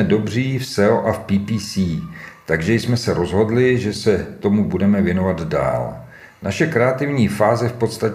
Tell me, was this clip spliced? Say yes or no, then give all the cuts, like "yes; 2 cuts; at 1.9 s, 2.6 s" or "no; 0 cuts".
no; 0 cuts